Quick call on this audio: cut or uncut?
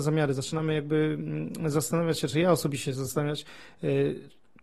uncut